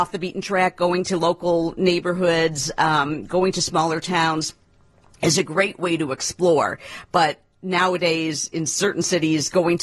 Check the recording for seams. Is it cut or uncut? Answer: uncut